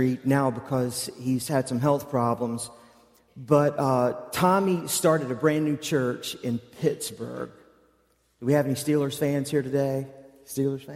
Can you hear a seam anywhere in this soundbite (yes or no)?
no